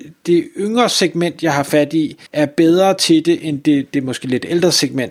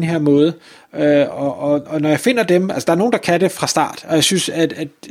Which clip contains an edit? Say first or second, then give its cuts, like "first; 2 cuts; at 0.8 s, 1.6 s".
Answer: first; 1 cut; at 2.3 s